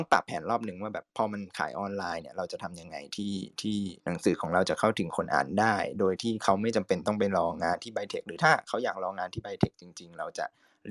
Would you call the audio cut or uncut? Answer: cut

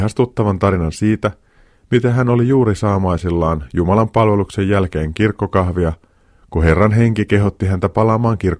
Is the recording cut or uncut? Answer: uncut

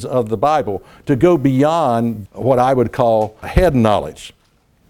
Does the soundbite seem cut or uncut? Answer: cut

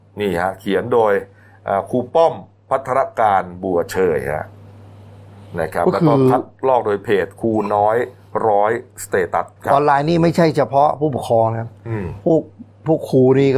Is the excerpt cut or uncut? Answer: cut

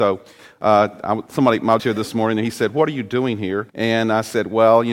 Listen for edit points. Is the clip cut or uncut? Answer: cut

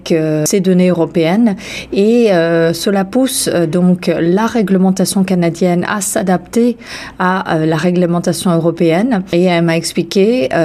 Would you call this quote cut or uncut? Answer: uncut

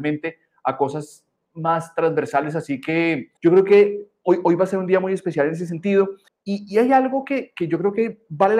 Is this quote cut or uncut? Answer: cut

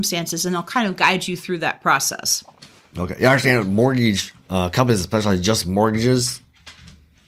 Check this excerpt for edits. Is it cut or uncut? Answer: uncut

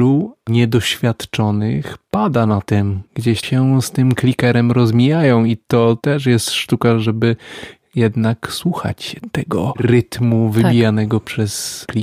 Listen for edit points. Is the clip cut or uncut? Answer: cut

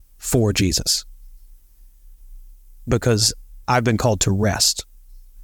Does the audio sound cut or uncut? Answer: cut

